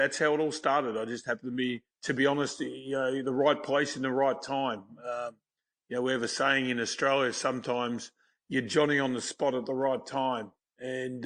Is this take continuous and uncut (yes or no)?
no